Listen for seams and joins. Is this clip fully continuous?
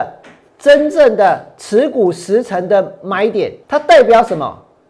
no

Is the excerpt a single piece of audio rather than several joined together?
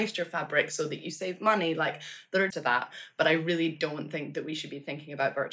no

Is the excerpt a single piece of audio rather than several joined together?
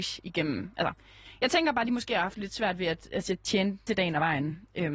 no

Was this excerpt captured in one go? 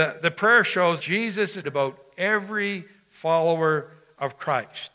no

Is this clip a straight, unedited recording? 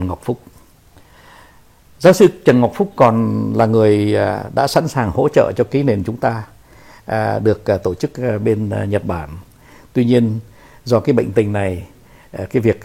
yes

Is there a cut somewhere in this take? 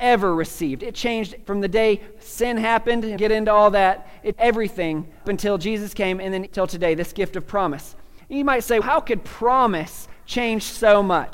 yes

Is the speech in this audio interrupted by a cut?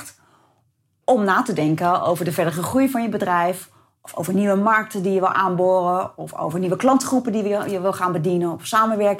no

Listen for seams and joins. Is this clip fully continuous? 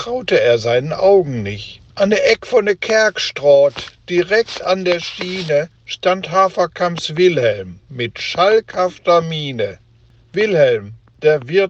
no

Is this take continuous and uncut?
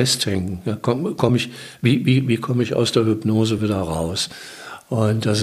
yes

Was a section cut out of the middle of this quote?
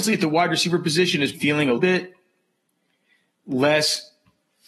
yes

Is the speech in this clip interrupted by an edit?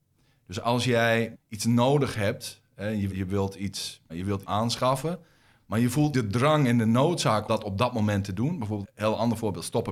yes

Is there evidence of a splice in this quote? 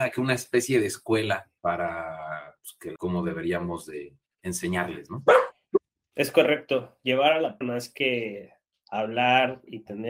yes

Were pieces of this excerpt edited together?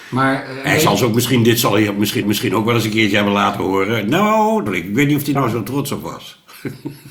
yes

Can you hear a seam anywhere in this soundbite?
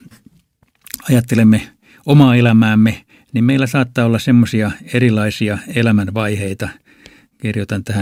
no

